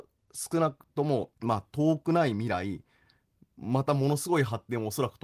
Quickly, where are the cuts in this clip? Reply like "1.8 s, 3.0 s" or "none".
1.3 s